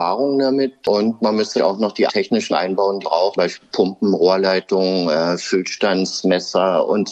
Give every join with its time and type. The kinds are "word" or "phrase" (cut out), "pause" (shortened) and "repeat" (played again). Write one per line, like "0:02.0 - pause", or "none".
0:01.6 - word
0:02.1 - word
0:02.5 - word
0:03.0 - word
0:03.4 - word